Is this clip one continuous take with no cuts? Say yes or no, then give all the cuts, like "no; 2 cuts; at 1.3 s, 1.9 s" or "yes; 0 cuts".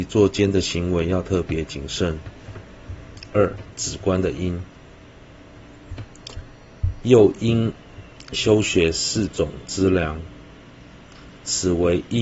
yes; 0 cuts